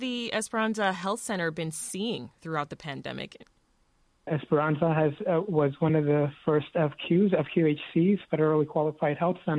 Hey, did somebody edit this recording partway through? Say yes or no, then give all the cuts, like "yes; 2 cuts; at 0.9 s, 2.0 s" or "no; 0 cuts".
no; 0 cuts